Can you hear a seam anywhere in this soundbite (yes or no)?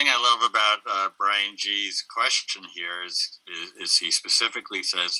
no